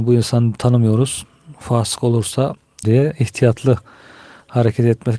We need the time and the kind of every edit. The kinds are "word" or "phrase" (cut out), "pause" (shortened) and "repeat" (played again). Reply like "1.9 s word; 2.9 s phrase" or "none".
2.8 s phrase

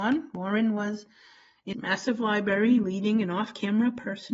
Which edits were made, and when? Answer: 1.7 s word

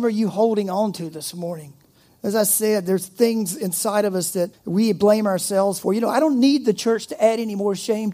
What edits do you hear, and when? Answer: 4.5 s pause

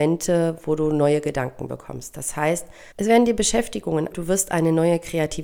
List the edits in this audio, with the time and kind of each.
2.9 s pause; 4.1 s phrase

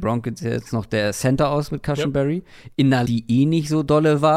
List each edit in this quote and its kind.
3.1 s word

